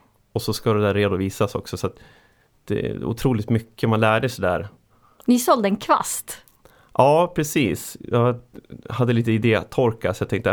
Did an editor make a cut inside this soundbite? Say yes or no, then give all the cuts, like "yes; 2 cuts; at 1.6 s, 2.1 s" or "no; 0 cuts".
no; 0 cuts